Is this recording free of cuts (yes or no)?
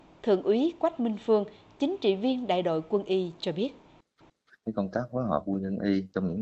yes